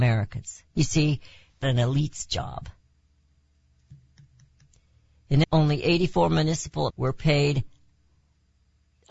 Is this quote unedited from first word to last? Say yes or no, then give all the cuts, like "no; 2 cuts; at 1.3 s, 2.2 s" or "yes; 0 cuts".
no; 3 cuts; at 1.6 s, 5.4 s, 6.9 s